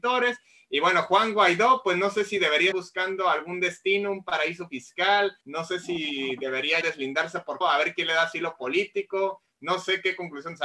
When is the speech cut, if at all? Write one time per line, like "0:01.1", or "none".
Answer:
0:02.7
0:05.4
0:06.8
0:07.6

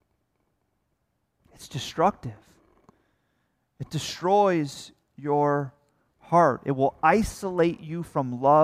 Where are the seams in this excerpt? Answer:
none

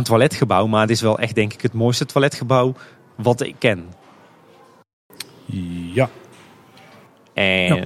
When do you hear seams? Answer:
none

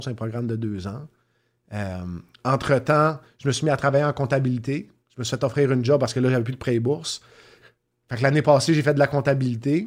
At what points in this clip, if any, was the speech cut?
none

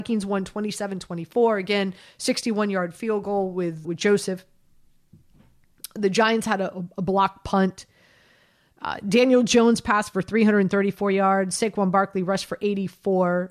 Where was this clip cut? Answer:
0:03.8

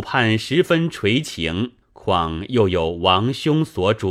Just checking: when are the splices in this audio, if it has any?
0:01.8

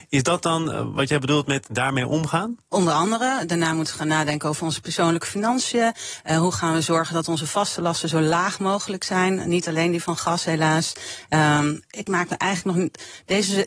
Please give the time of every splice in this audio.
none

